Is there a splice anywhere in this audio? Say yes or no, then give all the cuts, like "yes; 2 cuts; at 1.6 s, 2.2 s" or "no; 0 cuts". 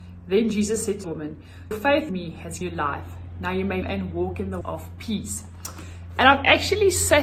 yes; 6 cuts; at 1.0 s, 1.7 s, 2.1 s, 2.6 s, 3.8 s, 4.6 s